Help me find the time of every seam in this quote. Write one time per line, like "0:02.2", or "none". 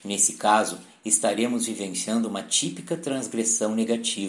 none